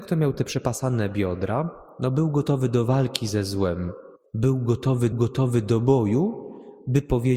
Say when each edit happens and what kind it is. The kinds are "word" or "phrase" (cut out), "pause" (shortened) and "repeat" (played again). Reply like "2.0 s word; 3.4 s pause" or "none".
4.2 s pause; 5.1 s repeat